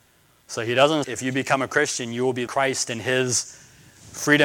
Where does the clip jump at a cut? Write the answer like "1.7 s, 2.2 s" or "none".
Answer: 1.0 s, 2.5 s